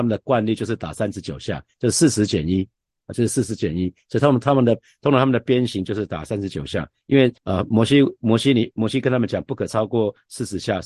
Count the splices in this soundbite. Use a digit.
1